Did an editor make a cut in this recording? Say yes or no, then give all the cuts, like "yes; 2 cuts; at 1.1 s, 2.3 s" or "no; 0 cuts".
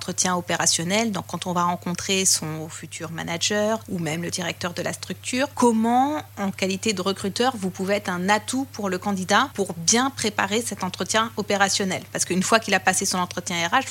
no; 0 cuts